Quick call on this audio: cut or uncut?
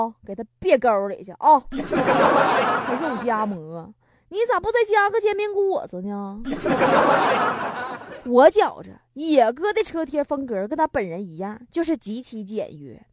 uncut